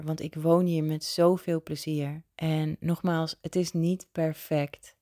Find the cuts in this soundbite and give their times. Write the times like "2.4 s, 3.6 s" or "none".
2.3 s